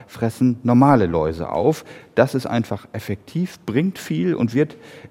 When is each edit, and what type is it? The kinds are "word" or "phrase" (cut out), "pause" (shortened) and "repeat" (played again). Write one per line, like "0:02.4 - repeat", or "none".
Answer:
none